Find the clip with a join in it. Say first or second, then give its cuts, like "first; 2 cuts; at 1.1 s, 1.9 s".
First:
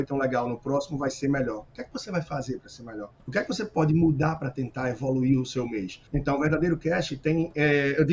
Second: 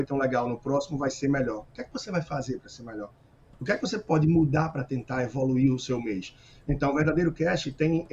first; 2 cuts; at 3.2 s, 6.1 s